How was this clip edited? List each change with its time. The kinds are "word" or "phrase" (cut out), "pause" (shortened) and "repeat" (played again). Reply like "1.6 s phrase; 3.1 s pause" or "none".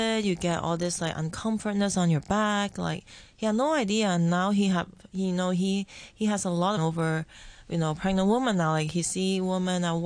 6.8 s phrase